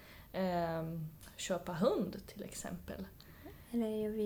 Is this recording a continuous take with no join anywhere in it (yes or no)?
yes